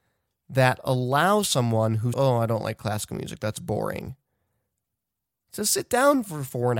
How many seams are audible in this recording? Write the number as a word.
one